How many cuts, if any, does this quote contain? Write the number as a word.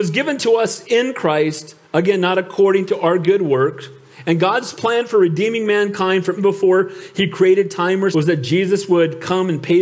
two